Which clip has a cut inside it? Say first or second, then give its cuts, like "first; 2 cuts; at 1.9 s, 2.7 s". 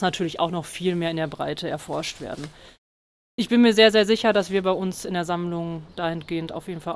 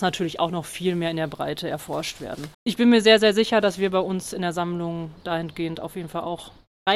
second; 1 cut; at 2.5 s